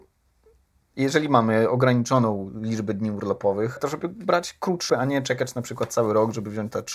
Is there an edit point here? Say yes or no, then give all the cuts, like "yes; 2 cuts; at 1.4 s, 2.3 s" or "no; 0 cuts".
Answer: yes; 2 cuts; at 3.8 s, 4.9 s